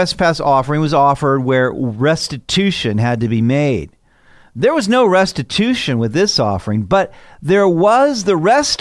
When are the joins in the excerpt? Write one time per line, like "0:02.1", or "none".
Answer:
none

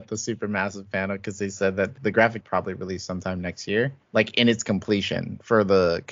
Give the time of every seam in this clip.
0:02.0
0:02.4
0:04.0

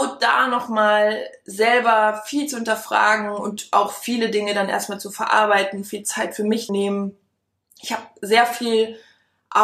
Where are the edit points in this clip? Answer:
0:06.7

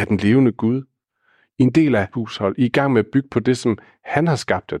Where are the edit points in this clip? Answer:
0:02.1

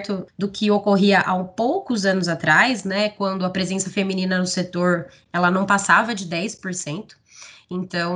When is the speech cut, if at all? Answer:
none

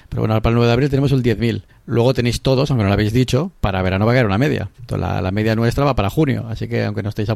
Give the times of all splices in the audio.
0:01.7
0:04.7

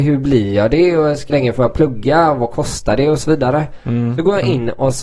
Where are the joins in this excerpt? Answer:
0:01.3

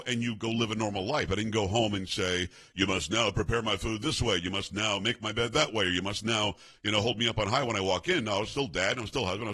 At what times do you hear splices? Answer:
none

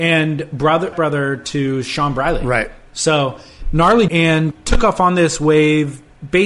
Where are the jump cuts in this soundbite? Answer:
0:00.9
0:04.1
0:04.5

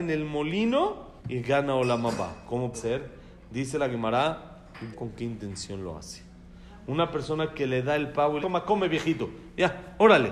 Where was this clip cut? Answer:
0:01.2
0:02.7
0:04.9
0:08.4

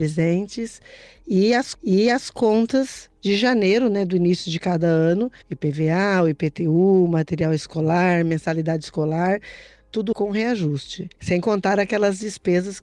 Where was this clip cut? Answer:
0:01.7
0:05.4
0:10.1
0:11.1

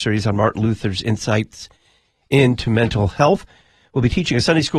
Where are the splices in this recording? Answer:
none

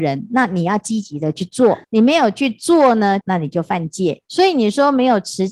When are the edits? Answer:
0:01.8
0:03.2
0:04.2

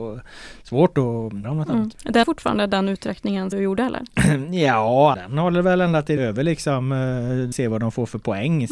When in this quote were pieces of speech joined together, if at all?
0:01.4
0:02.2
0:03.5
0:05.1
0:06.2
0:07.5

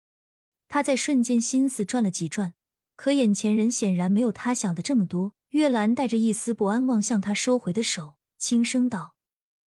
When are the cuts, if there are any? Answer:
0:05.4

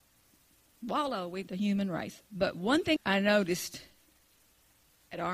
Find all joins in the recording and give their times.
0:01.5
0:02.3
0:03.0

